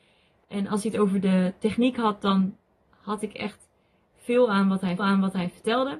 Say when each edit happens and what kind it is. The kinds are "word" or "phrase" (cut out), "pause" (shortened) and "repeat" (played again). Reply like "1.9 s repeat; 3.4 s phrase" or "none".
5.0 s repeat